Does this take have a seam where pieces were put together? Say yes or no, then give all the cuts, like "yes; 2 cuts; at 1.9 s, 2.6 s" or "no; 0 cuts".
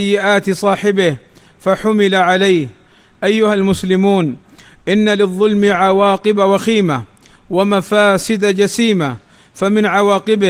no; 0 cuts